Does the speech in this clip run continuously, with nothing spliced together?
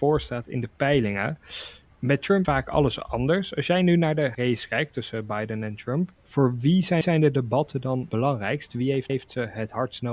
no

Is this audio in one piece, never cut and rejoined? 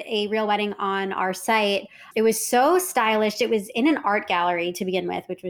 yes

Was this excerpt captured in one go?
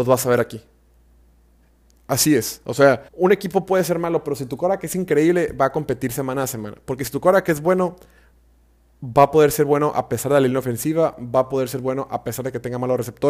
no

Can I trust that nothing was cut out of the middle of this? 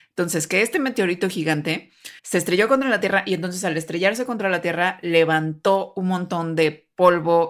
no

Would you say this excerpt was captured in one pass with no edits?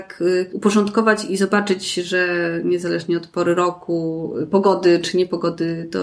yes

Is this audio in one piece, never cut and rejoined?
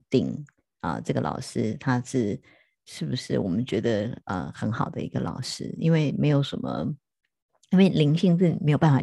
yes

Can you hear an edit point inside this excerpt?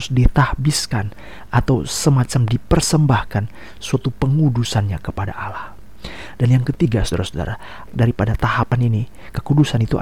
yes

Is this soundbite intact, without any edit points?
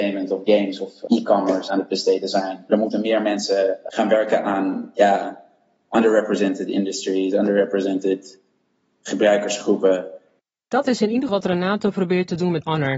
no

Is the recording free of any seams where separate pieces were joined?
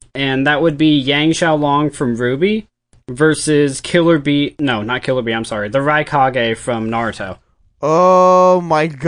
yes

